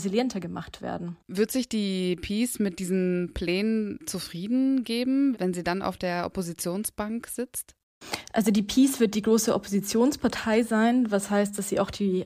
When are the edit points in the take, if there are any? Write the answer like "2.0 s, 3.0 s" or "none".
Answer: 1.2 s